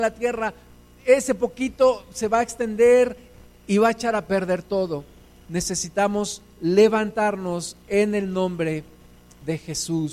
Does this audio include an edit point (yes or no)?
no